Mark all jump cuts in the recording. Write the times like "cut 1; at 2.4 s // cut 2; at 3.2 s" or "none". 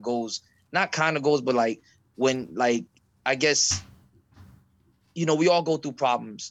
none